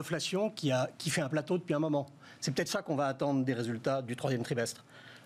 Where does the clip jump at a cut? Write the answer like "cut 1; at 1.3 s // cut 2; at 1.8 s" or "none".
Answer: none